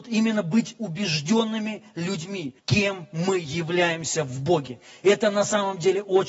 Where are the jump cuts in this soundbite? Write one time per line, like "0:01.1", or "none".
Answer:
0:02.6